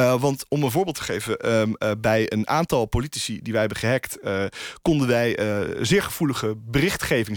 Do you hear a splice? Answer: no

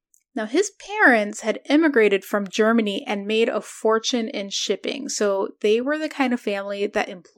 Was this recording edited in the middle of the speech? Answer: no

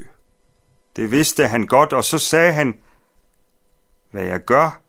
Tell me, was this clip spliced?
no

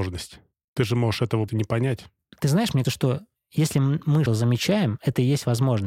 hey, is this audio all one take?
no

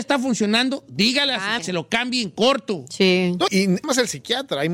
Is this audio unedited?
no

